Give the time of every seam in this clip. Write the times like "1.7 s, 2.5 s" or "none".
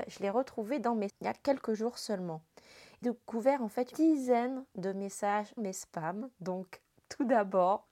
1.1 s, 3.0 s, 3.9 s, 5.6 s